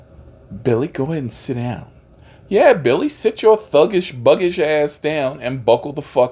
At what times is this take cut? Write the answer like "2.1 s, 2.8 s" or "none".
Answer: none